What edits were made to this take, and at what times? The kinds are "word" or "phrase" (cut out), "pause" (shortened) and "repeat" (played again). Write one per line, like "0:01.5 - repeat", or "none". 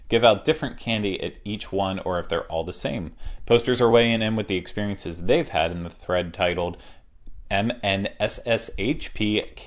none